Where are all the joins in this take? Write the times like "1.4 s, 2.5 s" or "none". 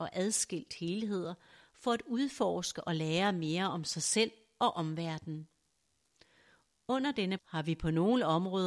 7.4 s